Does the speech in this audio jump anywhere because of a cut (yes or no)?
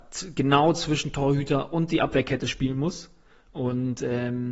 no